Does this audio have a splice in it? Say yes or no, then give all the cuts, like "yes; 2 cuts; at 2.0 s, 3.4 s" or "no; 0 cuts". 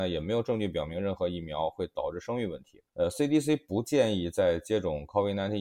yes; 1 cut; at 2.9 s